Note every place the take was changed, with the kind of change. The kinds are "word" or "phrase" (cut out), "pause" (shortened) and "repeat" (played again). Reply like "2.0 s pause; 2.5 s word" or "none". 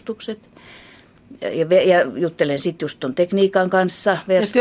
none